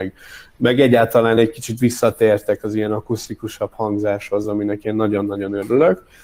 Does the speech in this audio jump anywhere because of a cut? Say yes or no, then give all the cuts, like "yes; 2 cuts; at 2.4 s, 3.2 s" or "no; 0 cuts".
no; 0 cuts